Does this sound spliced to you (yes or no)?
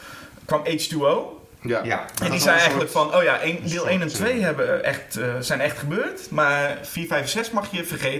no